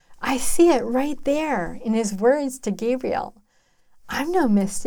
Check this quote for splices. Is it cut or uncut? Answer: uncut